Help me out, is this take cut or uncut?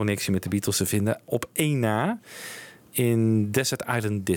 uncut